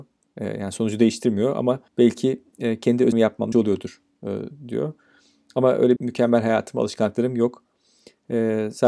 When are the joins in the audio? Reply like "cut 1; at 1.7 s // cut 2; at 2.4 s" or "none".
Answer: cut 1; at 1.9 s // cut 2; at 3.1 s // cut 3; at 3.5 s // cut 4; at 6.0 s